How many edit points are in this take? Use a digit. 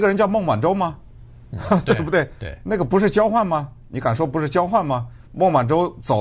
1